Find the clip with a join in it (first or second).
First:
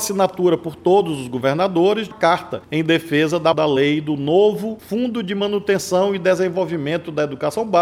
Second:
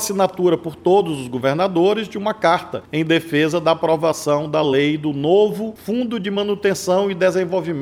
first